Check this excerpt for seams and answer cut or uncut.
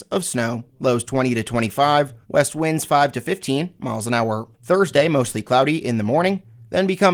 cut